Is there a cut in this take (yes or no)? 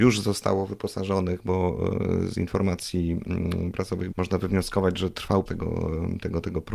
yes